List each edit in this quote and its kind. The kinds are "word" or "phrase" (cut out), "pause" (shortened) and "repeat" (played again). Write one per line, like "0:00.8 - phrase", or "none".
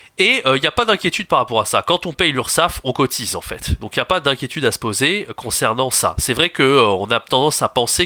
none